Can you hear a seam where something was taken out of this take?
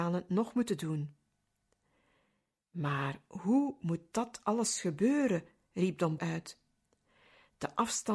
yes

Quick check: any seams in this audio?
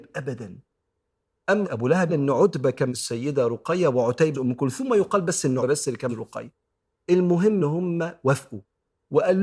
yes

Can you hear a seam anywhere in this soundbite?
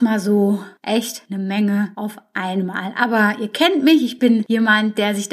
no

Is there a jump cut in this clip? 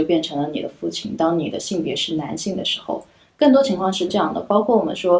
no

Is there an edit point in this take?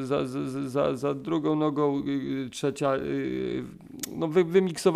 no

